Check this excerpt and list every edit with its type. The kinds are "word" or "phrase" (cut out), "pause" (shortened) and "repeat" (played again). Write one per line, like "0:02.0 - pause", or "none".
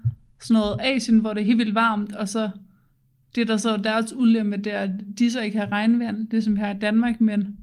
none